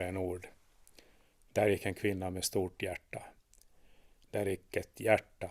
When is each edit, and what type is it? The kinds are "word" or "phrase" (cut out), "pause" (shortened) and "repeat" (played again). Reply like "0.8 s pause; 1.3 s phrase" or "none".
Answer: none